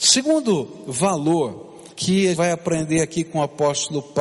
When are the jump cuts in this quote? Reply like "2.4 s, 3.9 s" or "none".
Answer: 1.9 s, 2.4 s